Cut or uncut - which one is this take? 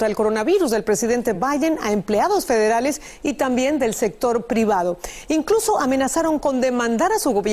uncut